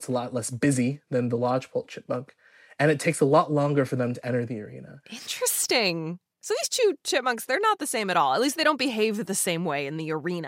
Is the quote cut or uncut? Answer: uncut